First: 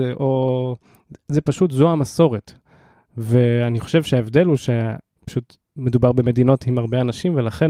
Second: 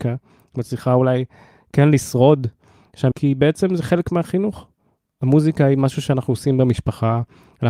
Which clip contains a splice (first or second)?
second